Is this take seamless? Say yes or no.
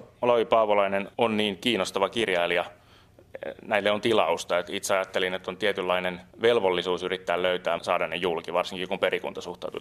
no